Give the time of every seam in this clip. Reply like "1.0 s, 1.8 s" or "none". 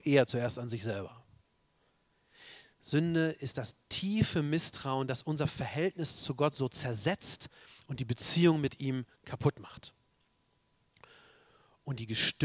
none